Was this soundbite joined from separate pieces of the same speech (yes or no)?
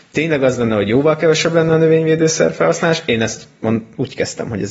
no